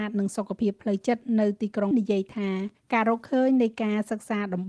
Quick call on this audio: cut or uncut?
cut